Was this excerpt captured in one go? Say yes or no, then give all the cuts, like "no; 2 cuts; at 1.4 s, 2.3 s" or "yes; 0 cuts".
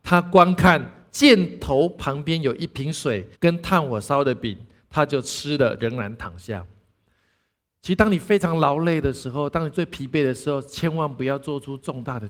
no; 2 cuts; at 3.3 s, 5.8 s